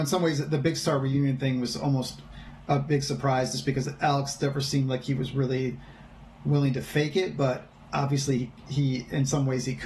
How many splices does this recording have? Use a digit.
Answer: 0